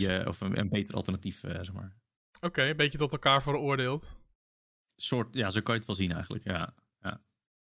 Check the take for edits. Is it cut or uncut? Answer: uncut